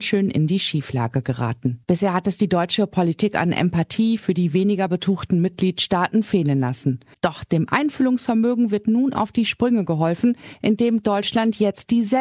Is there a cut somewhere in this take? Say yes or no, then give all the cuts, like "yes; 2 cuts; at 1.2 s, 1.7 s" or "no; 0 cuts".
yes; 2 cuts; at 1.8 s, 7.1 s